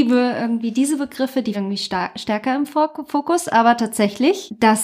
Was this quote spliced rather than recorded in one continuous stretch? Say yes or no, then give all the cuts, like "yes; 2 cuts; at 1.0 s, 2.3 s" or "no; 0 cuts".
yes; 1 cut; at 1.5 s